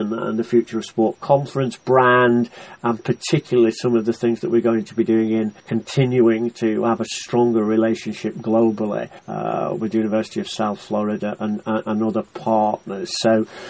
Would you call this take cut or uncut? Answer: cut